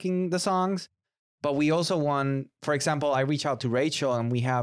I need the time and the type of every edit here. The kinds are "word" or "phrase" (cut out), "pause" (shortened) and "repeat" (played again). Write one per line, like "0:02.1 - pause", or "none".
none